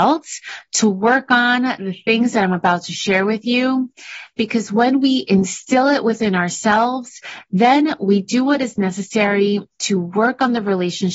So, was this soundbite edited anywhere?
no; 0 cuts

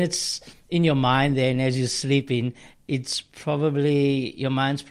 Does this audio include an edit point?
no; 0 cuts

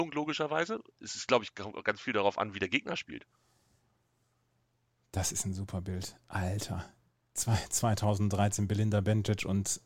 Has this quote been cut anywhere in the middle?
no; 0 cuts

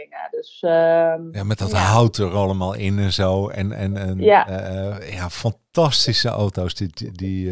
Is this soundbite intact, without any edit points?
yes; 0 cuts

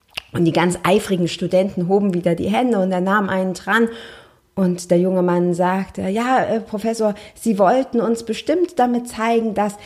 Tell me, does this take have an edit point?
no; 0 cuts

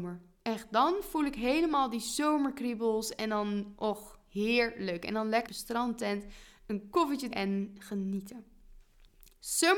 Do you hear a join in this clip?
yes; 2 cuts; at 5.5 s, 7.3 s

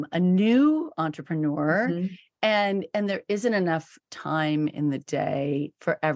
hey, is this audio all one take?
yes; 0 cuts

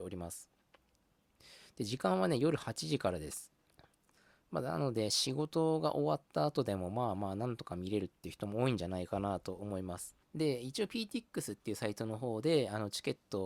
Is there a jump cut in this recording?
yes; 1 cut; at 10.2 s

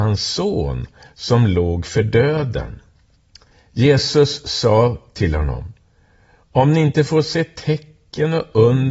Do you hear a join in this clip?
no; 0 cuts

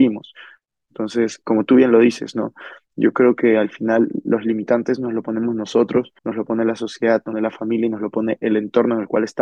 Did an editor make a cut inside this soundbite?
yes; 3 cuts; at 1.4 s, 6.2 s, 7.3 s

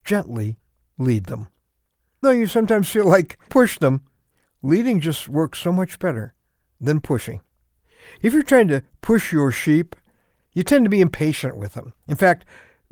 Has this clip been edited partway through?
yes; 2 cuts; at 2.2 s, 3.5 s

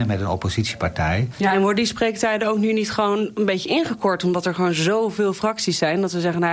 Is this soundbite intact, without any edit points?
yes; 0 cuts

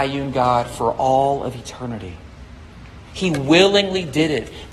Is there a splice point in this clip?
no; 0 cuts

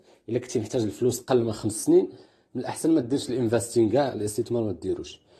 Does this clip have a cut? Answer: no; 0 cuts

